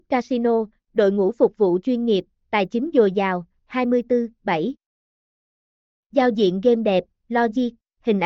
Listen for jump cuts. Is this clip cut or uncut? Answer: uncut